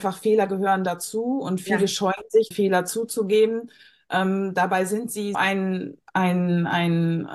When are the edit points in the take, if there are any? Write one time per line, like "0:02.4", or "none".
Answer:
0:02.5
0:05.3
0:06.0